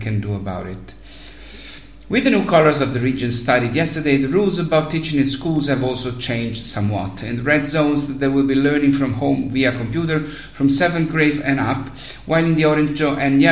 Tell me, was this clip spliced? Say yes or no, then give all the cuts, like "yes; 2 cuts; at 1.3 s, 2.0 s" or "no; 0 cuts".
no; 0 cuts